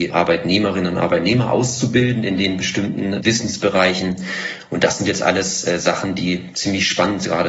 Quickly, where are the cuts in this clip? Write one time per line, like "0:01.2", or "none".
none